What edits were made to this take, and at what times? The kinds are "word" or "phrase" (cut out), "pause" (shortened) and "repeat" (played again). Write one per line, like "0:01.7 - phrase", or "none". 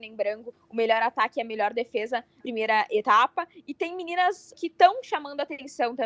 0:02.4 - word
0:04.5 - word